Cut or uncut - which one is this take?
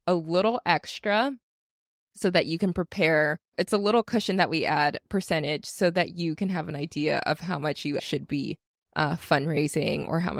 cut